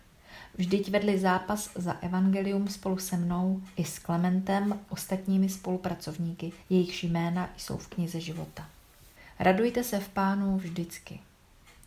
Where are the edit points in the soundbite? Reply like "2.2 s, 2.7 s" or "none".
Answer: 4.9 s, 6.6 s